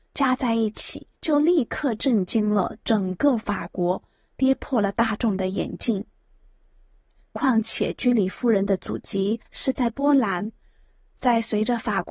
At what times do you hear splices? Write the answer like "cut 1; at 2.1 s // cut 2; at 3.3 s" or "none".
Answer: cut 1; at 1.1 s